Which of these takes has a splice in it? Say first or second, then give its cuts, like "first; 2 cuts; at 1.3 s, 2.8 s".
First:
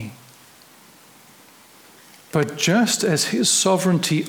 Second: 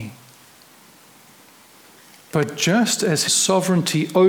second; 1 cut; at 3.3 s